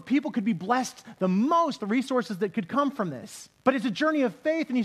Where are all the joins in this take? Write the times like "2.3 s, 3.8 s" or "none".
1.8 s, 3.6 s